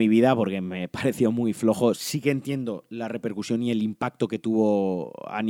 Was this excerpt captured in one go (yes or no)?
yes